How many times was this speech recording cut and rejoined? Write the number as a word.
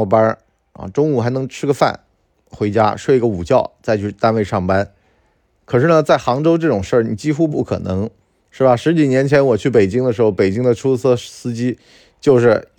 one